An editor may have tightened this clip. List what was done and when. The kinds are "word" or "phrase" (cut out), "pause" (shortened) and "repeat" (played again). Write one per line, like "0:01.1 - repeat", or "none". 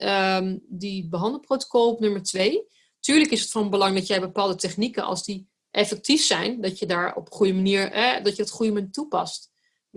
none